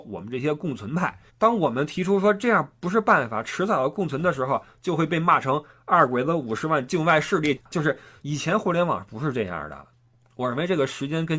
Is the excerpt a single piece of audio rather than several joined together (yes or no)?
no